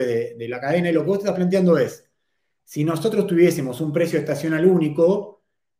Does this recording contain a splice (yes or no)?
no